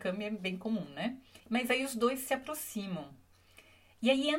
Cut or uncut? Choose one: cut